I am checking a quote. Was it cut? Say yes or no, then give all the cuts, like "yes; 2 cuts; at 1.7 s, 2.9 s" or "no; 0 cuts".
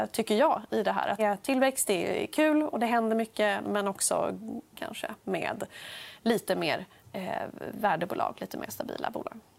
yes; 4 cuts; at 1.2 s, 2.7 s, 3.6 s, 4.7 s